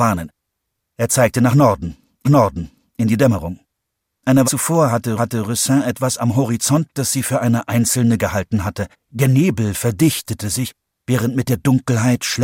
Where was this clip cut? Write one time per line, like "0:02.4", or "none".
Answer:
0:02.2
0:04.4
0:05.2
0:06.9
0:08.2
0:08.9